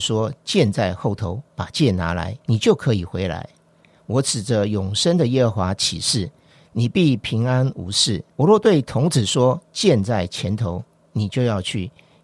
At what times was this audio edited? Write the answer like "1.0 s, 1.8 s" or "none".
2.4 s, 8.3 s